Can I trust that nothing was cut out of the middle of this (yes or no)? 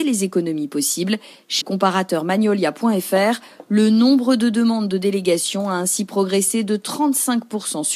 no